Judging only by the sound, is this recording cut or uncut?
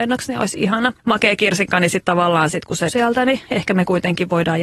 cut